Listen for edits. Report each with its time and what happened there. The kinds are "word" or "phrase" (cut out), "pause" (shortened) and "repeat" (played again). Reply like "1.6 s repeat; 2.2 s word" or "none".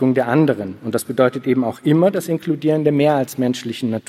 none